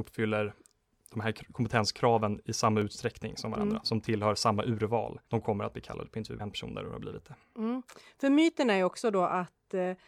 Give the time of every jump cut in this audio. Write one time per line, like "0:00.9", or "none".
0:05.3
0:06.4